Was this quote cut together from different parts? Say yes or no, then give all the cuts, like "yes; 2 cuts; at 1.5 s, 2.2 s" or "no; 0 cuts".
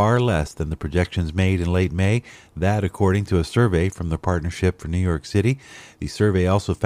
no; 0 cuts